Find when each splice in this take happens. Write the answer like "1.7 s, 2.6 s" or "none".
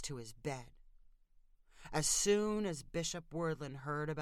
none